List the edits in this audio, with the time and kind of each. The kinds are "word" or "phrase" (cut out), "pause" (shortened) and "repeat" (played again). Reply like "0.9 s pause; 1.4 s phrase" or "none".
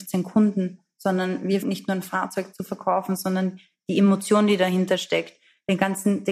1.6 s word